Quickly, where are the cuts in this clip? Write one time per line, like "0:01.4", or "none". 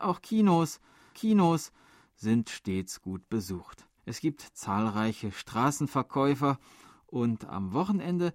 0:01.1
0:04.0